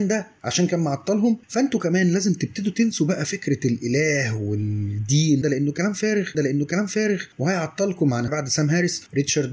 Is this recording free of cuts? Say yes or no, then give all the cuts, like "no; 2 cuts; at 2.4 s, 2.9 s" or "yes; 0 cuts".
no; 4 cuts; at 1.4 s, 5.4 s, 6.3 s, 8.3 s